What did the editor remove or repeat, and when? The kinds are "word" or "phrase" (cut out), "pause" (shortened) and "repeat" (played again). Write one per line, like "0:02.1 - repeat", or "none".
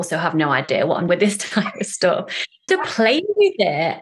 0:01.1 - word
0:02.7 - word